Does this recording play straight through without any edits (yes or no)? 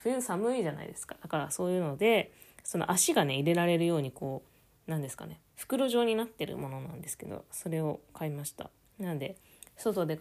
no